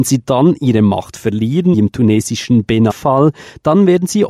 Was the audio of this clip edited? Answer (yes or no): yes